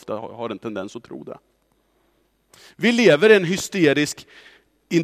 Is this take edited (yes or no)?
no